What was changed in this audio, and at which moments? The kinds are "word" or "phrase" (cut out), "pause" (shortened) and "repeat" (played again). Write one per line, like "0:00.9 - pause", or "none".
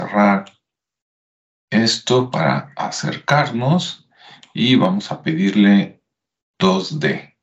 none